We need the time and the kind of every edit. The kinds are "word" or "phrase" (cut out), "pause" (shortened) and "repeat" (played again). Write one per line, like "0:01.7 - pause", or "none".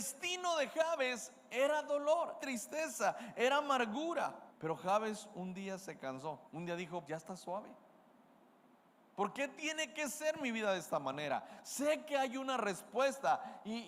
0:02.4 - word
0:04.5 - pause
0:06.5 - pause
0:07.1 - word